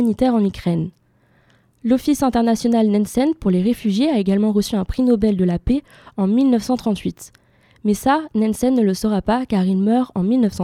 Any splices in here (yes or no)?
no